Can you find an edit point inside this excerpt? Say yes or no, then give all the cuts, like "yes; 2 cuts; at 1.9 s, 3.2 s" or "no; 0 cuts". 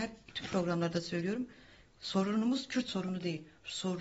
no; 0 cuts